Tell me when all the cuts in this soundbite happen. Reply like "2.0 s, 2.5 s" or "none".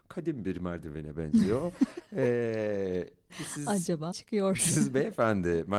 3.3 s, 4.1 s